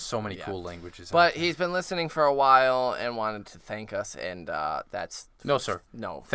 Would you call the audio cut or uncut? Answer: uncut